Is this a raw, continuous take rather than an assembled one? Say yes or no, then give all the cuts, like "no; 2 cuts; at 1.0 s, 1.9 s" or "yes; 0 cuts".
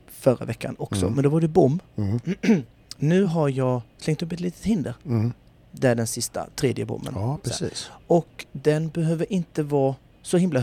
yes; 0 cuts